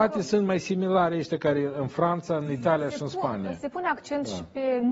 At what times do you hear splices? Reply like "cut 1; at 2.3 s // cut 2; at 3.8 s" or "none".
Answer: none